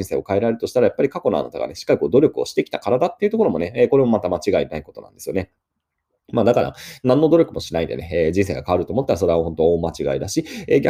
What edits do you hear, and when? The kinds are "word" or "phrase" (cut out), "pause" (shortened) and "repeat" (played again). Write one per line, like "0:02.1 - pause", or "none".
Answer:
none

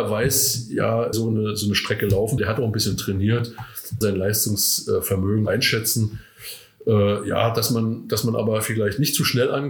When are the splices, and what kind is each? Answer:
0:01.1 - word
0:02.4 - word
0:04.0 - word
0:05.5 - word

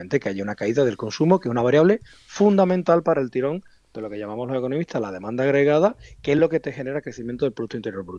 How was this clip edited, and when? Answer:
none

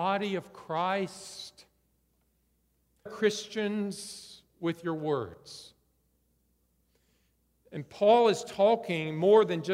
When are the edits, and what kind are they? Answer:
0:03.1 - word

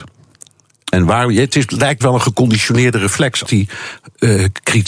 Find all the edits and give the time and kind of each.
0:02.0 - word
0:03.5 - word

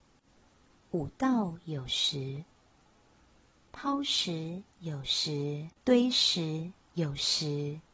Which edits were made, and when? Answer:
0:05.8 - pause

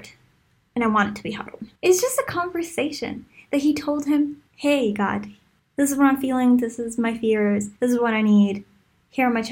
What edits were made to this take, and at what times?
0:01.8 - pause
0:04.5 - pause
0:05.6 - pause
0:07.8 - pause

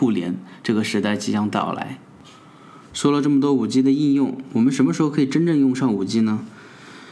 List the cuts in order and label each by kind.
none

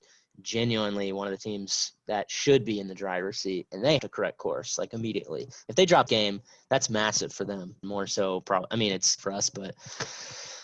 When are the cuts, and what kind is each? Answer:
0:04.0 - word
0:06.1 - word
0:07.8 - word
0:09.2 - phrase

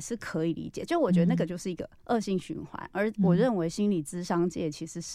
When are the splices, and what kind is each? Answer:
0:02.0 - pause

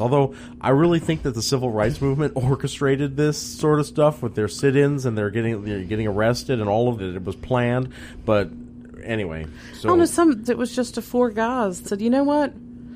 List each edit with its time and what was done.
0:07.0 - word
0:10.5 - word
0:11.8 - word

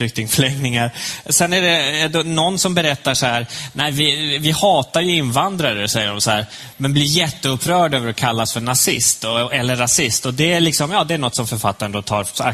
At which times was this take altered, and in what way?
none

